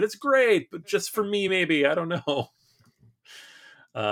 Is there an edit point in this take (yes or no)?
no